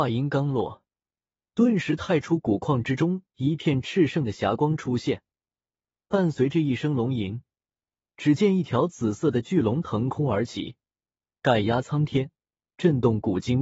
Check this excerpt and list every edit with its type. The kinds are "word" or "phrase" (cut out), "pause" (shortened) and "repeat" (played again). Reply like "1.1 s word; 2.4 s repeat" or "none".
none